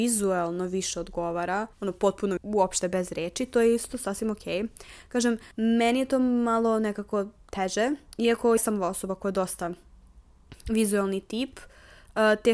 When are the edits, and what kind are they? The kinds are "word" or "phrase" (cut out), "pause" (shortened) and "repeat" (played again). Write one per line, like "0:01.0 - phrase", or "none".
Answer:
0:01.7 - pause
0:02.4 - word
0:05.5 - pause
0:08.6 - word